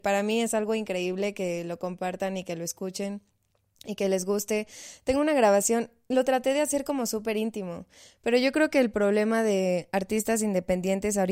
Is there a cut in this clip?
no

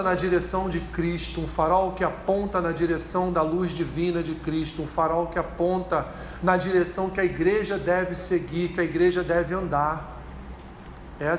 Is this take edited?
no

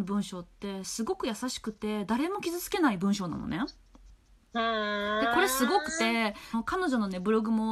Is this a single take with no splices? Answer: yes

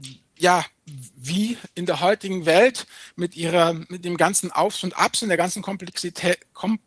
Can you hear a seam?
no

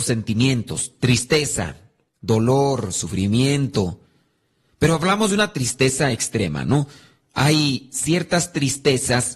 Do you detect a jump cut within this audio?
no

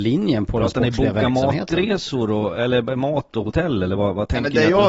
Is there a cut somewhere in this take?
no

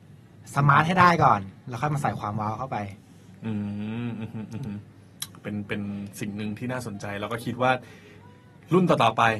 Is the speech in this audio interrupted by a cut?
no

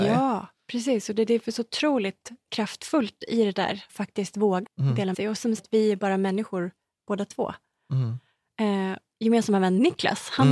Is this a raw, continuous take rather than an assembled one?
no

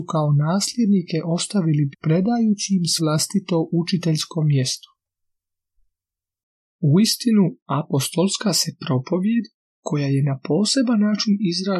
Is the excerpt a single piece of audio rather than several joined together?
no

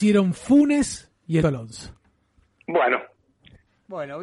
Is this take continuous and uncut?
no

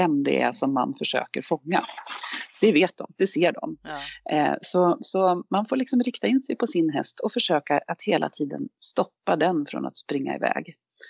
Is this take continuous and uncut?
yes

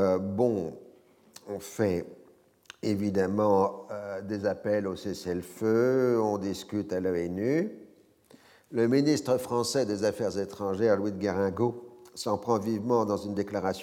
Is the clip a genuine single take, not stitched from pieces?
yes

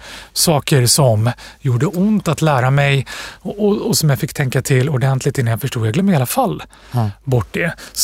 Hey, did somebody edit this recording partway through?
no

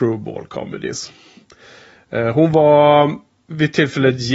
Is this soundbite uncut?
yes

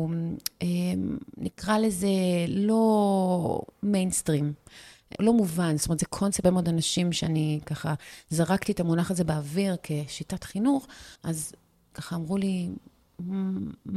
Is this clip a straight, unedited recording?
no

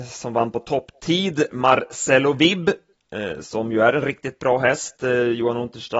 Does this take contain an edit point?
no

